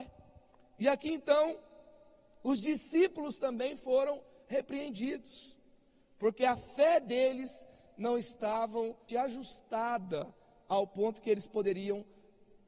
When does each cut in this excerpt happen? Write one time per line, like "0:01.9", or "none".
0:09.1